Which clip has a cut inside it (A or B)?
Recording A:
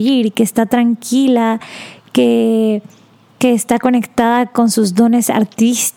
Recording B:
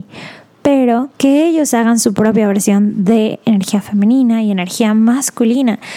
B